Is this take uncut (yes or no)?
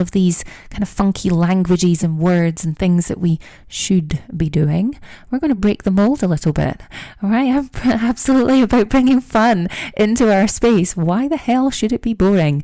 yes